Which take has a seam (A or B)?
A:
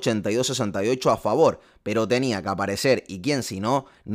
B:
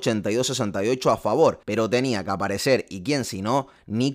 B